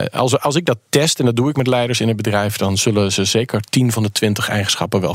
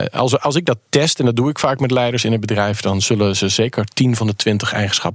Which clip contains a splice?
first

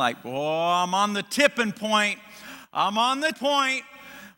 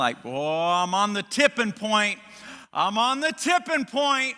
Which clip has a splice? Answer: first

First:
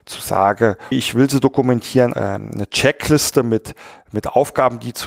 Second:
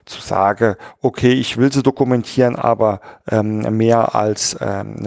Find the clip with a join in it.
first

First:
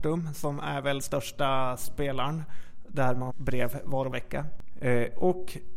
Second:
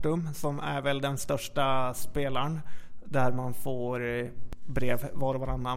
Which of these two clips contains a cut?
first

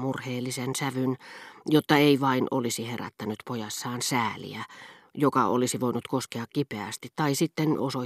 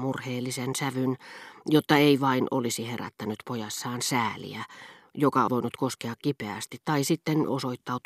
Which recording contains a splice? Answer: second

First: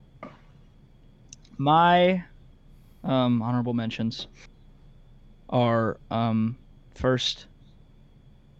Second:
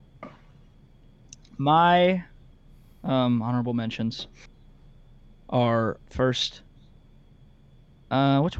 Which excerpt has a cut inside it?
second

